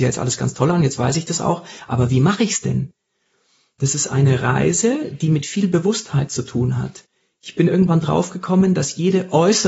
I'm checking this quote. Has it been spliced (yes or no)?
no